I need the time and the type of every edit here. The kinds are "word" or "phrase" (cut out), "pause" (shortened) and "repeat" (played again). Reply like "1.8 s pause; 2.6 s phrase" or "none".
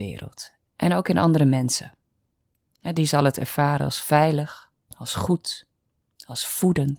none